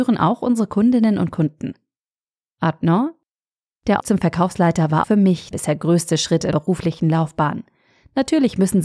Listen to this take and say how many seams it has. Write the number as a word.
four